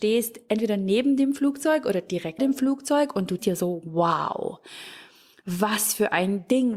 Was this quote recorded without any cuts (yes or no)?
no